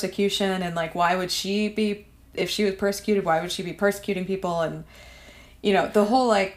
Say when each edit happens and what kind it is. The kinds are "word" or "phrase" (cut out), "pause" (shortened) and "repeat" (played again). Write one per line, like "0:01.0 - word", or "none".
none

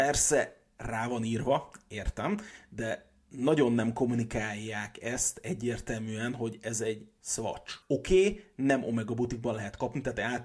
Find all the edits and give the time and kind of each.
0:07.8 - pause

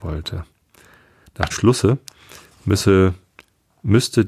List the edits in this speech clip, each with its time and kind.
0:01.5 - word

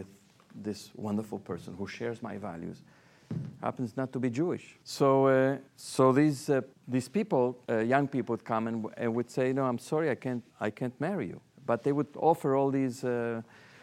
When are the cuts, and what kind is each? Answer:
0:04.8 - pause
0:05.7 - pause
0:06.7 - pause
0:07.6 - pause
0:10.5 - pause

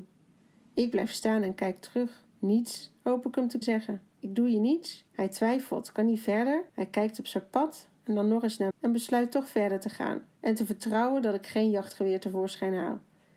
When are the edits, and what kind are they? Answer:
0:02.3 - pause
0:03.6 - word
0:04.1 - pause
0:05.1 - pause
0:06.7 - pause
0:08.7 - word
0:10.3 - pause

